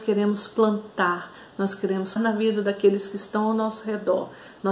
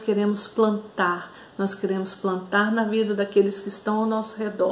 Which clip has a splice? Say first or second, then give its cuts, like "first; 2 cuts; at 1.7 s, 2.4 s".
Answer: first; 1 cut; at 2.2 s